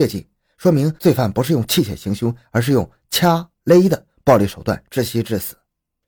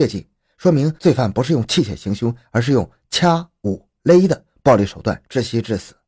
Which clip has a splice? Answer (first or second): first